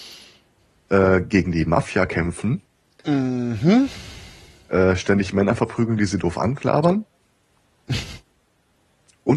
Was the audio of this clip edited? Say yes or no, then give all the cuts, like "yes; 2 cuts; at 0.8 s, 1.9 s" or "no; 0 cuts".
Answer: no; 0 cuts